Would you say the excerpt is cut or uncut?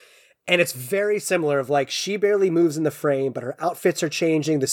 uncut